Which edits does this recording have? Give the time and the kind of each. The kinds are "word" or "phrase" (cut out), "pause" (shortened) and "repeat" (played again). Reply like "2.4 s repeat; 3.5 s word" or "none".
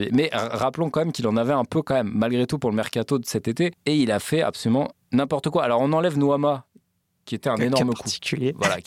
3.8 s pause

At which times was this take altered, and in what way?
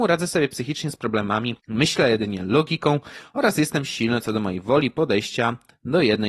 1.6 s pause

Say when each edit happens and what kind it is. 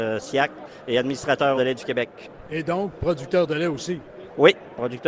1.6 s phrase

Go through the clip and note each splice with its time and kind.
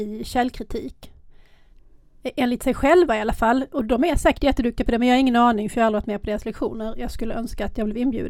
none

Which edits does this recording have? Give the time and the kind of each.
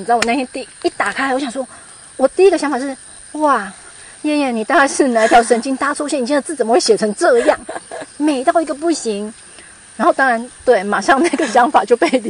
none

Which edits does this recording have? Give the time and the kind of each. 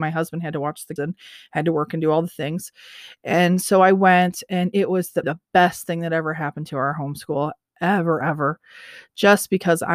1.0 s word; 5.2 s word; 8.2 s word

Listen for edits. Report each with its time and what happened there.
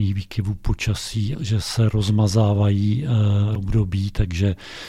1.3 s word; 3.6 s word

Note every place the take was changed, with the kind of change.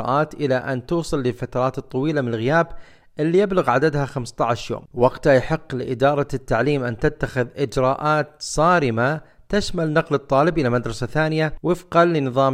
none

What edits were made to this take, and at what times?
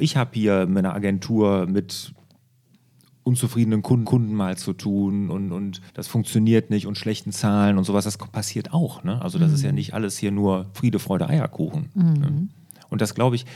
4.0 s repeat; 5.9 s pause

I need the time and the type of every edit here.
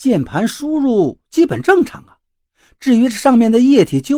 none

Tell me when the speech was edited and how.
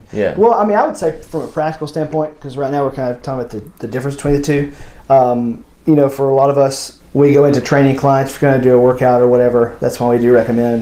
5.7 s pause; 7.0 s phrase

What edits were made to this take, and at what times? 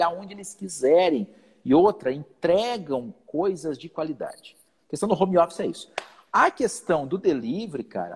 none

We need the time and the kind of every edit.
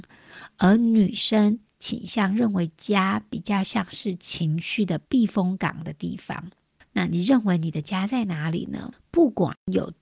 none

